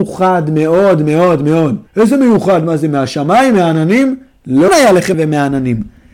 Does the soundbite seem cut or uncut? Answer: cut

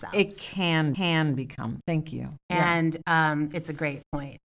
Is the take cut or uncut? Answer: cut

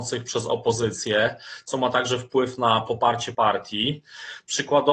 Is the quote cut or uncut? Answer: cut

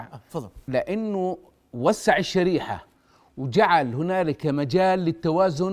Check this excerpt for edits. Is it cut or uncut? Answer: uncut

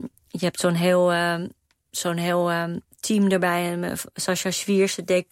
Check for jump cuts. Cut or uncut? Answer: uncut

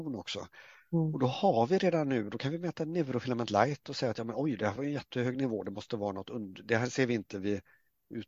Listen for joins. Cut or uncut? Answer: uncut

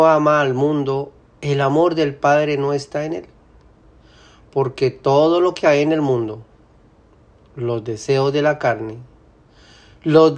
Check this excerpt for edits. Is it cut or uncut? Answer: uncut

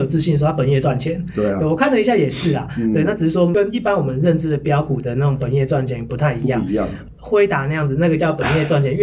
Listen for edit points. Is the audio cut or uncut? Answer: uncut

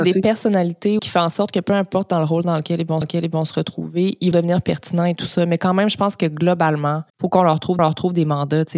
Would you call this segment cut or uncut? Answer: cut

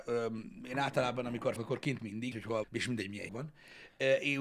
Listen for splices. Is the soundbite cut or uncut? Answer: cut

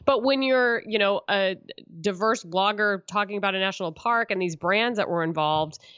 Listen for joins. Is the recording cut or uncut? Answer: uncut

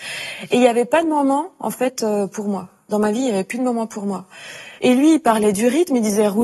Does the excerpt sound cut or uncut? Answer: cut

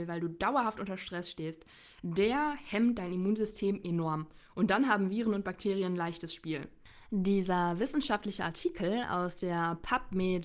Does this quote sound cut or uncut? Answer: cut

